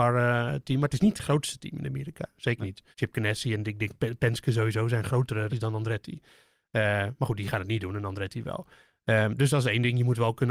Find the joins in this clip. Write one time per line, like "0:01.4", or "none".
0:02.9
0:05.5

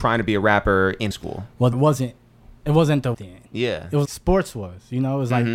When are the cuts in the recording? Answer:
0:01.1
0:01.7
0:02.6
0:03.1
0:04.0

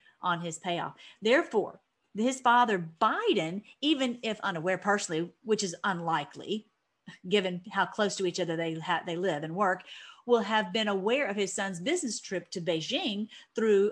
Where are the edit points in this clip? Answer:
none

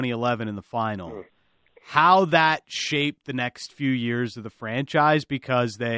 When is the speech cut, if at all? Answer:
none

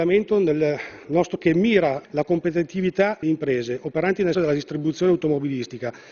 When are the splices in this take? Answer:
0:01.4
0:02.0
0:03.2
0:04.3

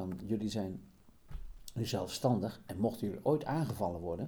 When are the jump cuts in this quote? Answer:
none

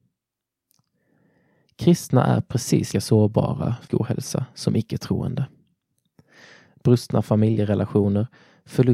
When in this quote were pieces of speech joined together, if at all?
0:02.9
0:03.9

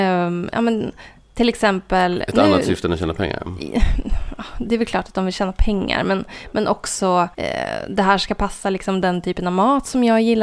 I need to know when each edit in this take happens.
0:07.3

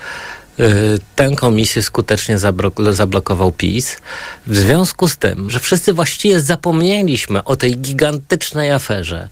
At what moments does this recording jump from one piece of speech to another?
0:05.5

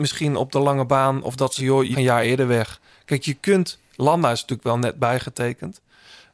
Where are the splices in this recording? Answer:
0:01.6
0:01.9

